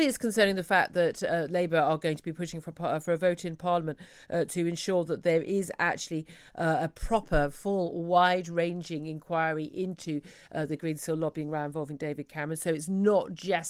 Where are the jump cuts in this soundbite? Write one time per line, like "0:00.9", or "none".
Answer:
none